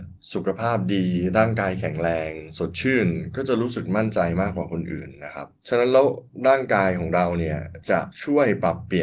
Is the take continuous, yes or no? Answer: no